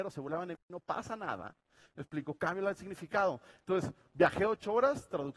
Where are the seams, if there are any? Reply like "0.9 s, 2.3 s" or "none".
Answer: none